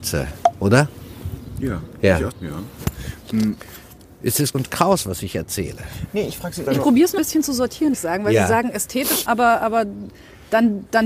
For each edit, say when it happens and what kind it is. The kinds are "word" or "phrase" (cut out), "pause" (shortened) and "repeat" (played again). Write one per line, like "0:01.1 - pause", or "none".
0:02.3 - word
0:04.5 - word
0:06.7 - word
0:07.2 - word
0:07.9 - word
0:09.3 - word